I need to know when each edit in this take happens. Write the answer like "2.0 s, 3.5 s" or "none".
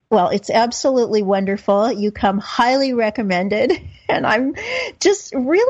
none